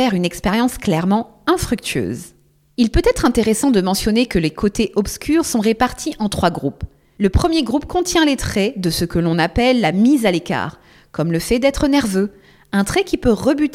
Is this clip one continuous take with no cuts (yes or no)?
yes